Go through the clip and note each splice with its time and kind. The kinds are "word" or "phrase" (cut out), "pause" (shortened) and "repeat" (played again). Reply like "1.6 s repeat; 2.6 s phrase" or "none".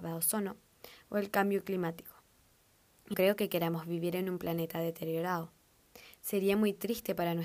3.1 s word